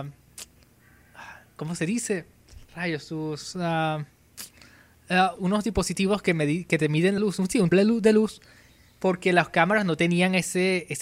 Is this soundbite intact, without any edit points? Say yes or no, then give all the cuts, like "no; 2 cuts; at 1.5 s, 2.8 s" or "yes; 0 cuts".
no; 4 cuts; at 2.6 s, 5.4 s, 7.2 s, 7.7 s